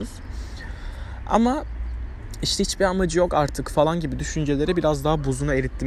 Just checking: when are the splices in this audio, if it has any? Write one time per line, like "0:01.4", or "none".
none